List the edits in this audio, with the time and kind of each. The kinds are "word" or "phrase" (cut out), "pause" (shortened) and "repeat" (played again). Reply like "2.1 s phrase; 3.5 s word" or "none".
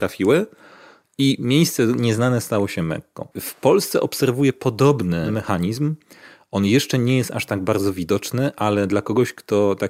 3.3 s pause